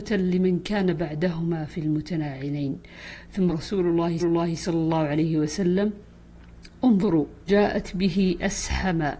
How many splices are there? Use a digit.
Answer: 3